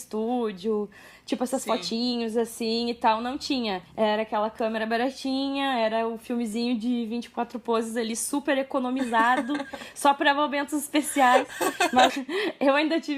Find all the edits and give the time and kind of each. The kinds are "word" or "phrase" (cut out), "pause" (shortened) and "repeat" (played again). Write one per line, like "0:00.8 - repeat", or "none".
0:03.9 - pause
0:12.1 - word